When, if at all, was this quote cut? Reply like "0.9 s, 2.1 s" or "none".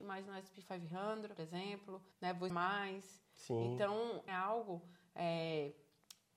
1.4 s, 2.1 s, 2.5 s, 4.3 s